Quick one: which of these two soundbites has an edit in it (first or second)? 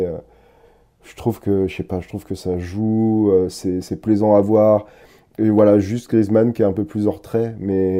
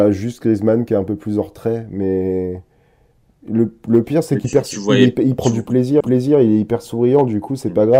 second